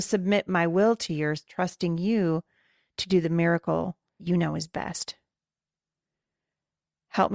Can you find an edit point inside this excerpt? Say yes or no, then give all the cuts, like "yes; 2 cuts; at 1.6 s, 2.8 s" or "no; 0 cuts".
yes; 1 cut; at 4.2 s